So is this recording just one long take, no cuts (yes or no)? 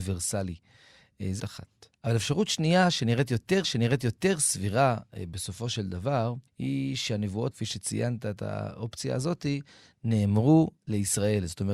no